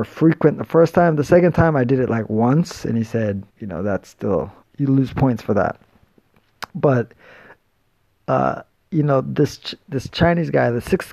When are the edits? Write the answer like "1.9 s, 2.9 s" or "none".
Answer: 3.5 s, 4.6 s, 6.7 s, 8.7 s